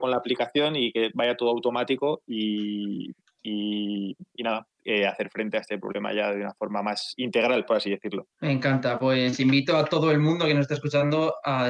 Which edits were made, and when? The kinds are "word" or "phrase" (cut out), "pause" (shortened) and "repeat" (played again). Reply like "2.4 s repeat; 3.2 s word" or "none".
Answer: 3.2 s pause; 8.3 s pause